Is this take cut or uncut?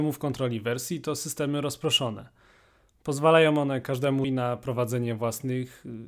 cut